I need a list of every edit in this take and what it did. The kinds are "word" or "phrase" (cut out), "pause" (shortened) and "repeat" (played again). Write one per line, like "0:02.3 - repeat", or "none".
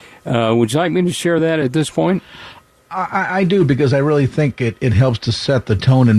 none